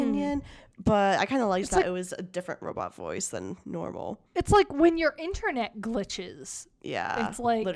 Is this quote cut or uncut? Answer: cut